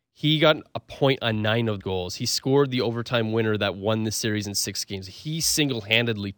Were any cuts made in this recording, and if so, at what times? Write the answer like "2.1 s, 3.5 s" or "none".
1.8 s